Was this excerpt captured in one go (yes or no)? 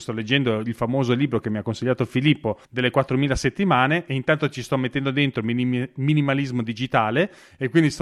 no